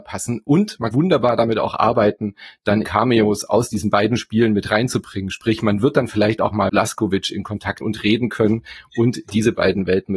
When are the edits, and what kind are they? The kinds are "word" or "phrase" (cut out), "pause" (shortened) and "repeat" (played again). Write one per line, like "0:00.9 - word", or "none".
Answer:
0:00.9 - word
0:02.8 - word
0:06.7 - word
0:07.8 - phrase